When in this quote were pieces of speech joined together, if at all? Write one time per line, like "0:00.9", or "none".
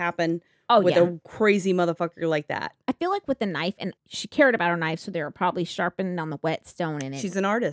0:02.8
0:04.0